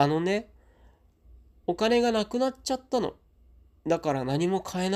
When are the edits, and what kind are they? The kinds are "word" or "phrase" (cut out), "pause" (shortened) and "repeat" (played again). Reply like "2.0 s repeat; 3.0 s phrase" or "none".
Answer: none